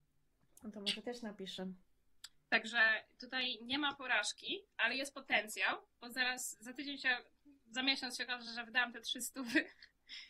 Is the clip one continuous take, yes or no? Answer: yes